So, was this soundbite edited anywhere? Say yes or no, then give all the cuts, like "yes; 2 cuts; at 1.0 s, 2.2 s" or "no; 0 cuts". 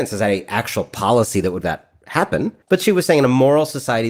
yes; 2 cuts; at 1.6 s, 2.6 s